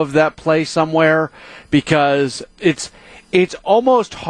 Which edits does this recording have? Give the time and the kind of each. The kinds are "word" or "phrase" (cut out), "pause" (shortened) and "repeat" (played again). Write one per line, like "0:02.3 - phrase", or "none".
none

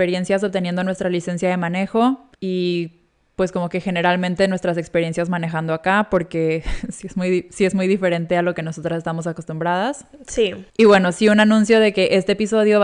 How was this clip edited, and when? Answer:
0:02.3 - pause
0:10.7 - pause

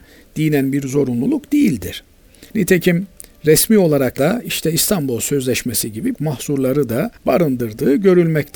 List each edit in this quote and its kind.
0:02.5 - pause
0:04.2 - word
0:06.1 - word
0:07.2 - pause

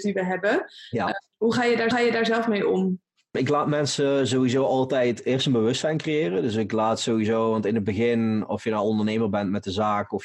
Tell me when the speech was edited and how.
0:01.9 - repeat

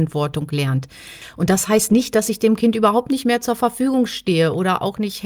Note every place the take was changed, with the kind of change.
none

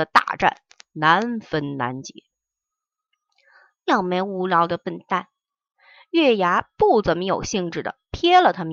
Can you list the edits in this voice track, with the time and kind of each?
none

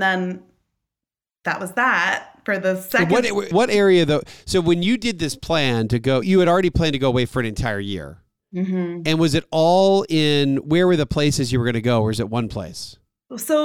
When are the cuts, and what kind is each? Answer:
0:03.5 - word
0:06.2 - word

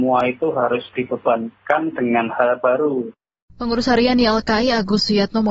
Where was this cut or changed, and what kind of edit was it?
0:00.9 - word

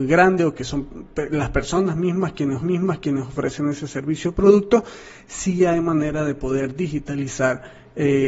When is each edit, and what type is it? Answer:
0:02.6 - repeat

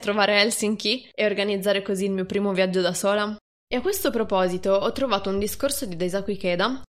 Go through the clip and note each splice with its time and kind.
none

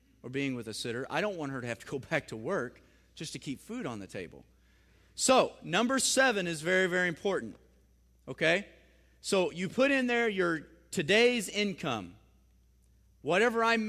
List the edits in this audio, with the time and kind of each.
none

